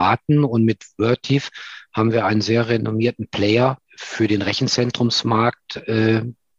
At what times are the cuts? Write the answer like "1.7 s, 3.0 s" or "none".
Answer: none